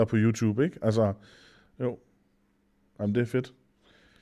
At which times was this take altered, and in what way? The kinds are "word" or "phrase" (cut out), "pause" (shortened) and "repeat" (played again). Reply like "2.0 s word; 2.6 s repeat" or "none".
none